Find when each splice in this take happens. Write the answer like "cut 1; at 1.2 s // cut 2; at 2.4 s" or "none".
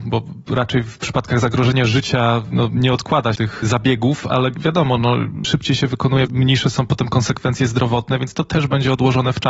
cut 1; at 3.4 s // cut 2; at 5.4 s // cut 3; at 6.3 s

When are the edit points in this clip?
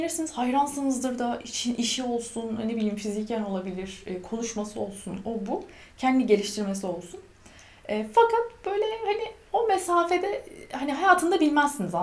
none

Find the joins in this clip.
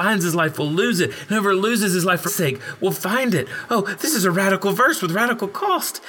cut 1; at 2.3 s

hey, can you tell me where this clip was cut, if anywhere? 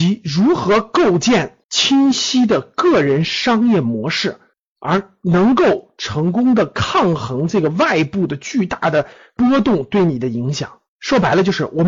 cut 1; at 1.6 s // cut 2; at 4.5 s // cut 3; at 10.9 s

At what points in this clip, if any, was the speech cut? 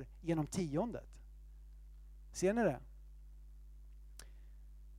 none

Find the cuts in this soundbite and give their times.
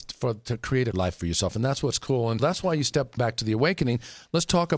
cut 1; at 0.9 s // cut 2; at 2.4 s // cut 3; at 3.2 s

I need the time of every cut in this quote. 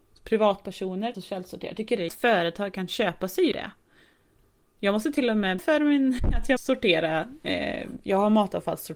cut 1; at 1.1 s // cut 2; at 2.1 s // cut 3; at 3.5 s // cut 4; at 5.6 s // cut 5; at 6.6 s

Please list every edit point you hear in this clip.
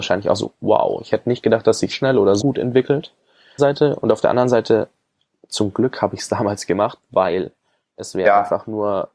cut 1; at 1.9 s // cut 2; at 2.4 s // cut 3; at 3.6 s

